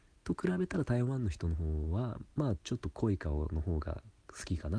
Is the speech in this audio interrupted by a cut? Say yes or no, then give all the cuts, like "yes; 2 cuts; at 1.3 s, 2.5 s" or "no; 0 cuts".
yes; 1 cut; at 2.3 s